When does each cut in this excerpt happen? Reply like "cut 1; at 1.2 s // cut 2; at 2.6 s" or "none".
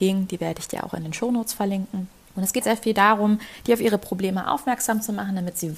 cut 1; at 2.3 s // cut 2; at 2.6 s